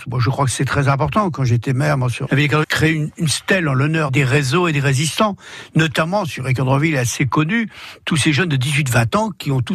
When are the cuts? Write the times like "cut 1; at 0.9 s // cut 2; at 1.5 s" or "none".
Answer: cut 1; at 2.3 s // cut 2; at 2.6 s // cut 3; at 4.1 s